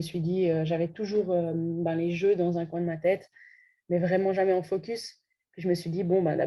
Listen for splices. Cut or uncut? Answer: uncut